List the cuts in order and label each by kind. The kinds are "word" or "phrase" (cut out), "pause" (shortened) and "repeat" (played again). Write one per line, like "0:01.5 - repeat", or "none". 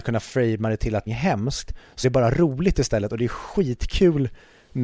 0:01.1 - phrase
0:02.0 - word